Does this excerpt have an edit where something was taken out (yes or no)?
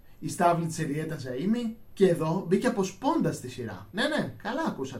no